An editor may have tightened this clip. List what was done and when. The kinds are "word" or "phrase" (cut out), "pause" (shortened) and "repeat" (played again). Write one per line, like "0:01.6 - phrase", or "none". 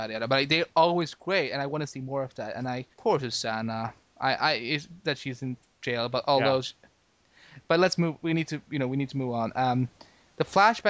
0:02.9 - pause

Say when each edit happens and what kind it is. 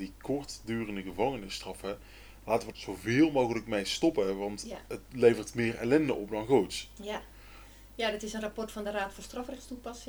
0:02.7 - word

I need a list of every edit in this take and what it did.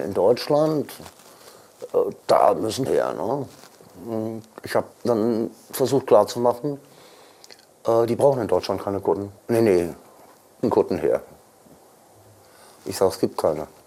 0:02.9 - word
0:04.9 - pause
0:09.4 - pause
0:10.6 - word

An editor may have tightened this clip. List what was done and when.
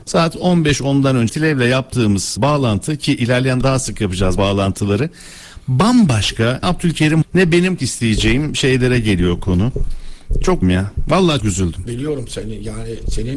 0:01.3 - word
0:02.4 - word
0:03.6 - word
0:04.4 - word
0:06.6 - word
0:07.2 - word
0:07.8 - word
0:10.6 - word
0:11.4 - word

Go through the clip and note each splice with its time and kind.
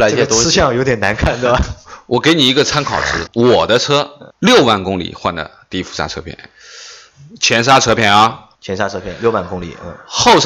0:03.3 - word
0:04.3 - pause
0:08.6 - pause

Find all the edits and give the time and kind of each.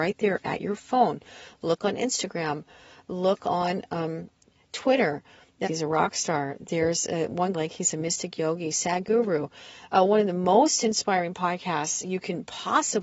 0:05.7 - phrase
0:07.5 - phrase

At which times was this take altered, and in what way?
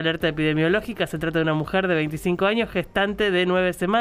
none

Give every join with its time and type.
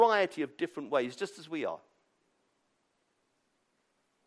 none

